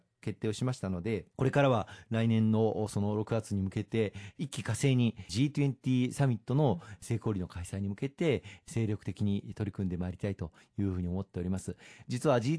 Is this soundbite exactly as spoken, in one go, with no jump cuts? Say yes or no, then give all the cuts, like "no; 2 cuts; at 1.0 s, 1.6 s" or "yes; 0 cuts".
no; 2 cuts; at 1.3 s, 5.3 s